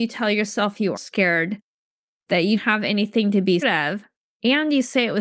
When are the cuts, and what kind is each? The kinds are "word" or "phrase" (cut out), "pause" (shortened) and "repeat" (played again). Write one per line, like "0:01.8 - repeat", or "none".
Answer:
0:01.0 - word
0:02.6 - word
0:03.6 - word